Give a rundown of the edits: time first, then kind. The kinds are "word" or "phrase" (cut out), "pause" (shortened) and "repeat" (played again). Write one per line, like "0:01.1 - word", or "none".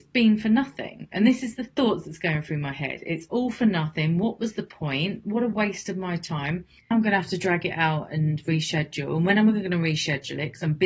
0:06.9 - word

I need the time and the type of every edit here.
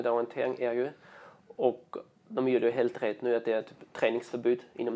none

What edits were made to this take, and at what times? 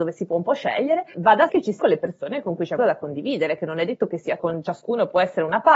0:01.1 - word
0:01.5 - word
0:01.8 - word
0:02.8 - word
0:04.4 - word

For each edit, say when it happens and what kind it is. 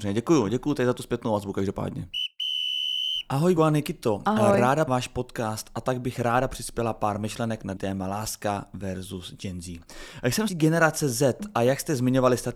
0:03.6 - word
0:04.9 - word
0:07.8 - word
0:10.5 - word

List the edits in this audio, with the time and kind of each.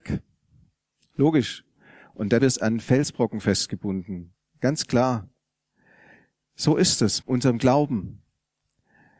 0:02.4 - word
0:07.2 - word

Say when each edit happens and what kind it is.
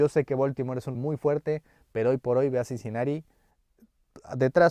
0:00.9 - word

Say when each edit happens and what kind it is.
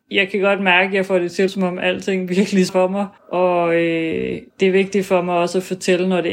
0:01.5 - word
0:02.7 - word
0:03.2 - pause
0:04.5 - pause

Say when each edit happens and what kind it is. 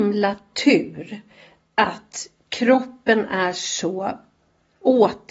none

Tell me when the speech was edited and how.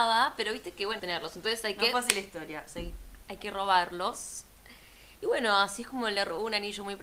0:01.0 - phrase
0:02.7 - word
0:05.2 - pause

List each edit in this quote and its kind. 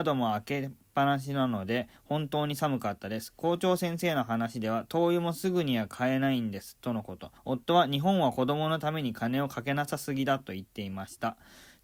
0:07.4 - pause

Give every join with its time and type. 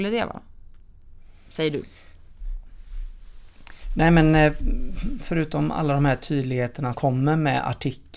0:06.9 - word

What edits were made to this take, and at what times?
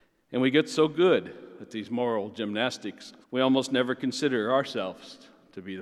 0:03.2 - pause

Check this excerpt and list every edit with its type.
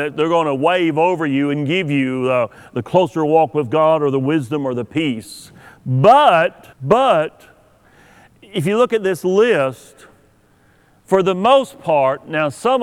0:06.7 - pause

